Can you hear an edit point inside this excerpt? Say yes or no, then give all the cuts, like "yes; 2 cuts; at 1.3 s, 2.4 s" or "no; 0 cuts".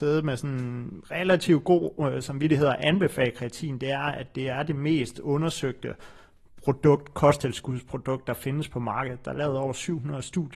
no; 0 cuts